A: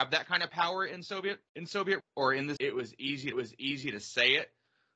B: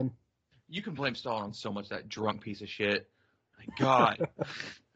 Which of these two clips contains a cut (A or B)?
A